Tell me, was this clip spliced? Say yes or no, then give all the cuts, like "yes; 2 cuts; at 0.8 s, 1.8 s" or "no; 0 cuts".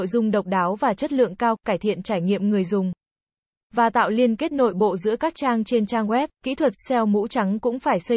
yes; 1 cut; at 6.3 s